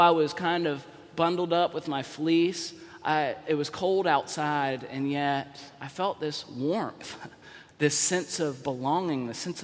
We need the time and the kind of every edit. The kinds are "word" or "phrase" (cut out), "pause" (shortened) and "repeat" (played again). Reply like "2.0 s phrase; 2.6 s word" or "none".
none